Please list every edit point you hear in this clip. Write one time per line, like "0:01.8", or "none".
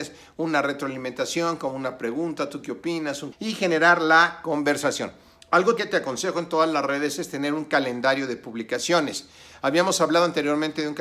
0:03.3
0:05.8